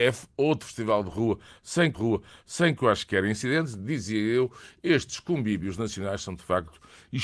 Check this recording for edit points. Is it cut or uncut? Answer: cut